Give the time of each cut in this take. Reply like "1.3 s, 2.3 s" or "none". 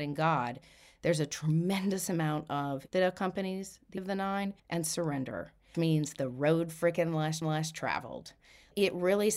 2.9 s, 4.0 s, 4.6 s, 5.7 s, 7.4 s